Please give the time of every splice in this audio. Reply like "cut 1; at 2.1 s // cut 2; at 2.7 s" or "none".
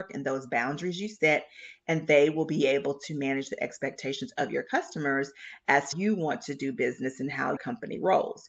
cut 1; at 5.9 s // cut 2; at 7.6 s